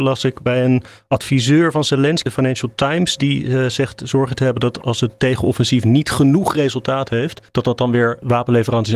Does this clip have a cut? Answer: yes; 2 cuts; at 2.3 s, 7.5 s

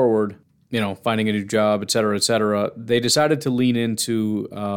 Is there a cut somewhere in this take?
no; 0 cuts

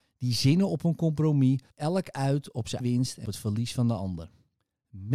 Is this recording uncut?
no; 3 cuts; at 1.7 s, 2.8 s, 3.2 s

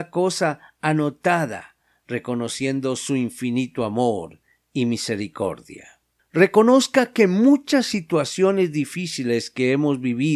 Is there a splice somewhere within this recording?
no; 0 cuts

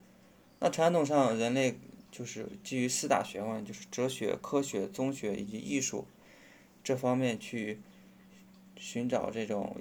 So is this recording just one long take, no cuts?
yes; 0 cuts

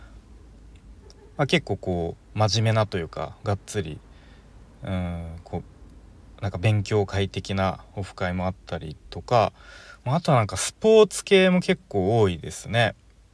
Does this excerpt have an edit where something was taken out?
yes; 1 cut; at 2.2 s

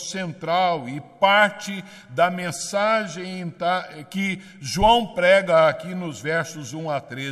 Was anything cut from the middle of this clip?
no; 0 cuts

